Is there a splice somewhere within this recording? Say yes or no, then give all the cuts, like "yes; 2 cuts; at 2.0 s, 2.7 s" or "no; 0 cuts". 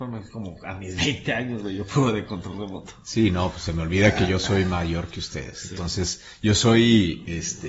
no; 0 cuts